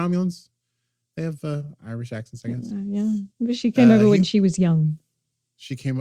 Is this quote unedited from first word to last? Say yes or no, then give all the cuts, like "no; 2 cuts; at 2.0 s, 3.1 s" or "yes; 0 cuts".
no; 1 cut; at 3.3 s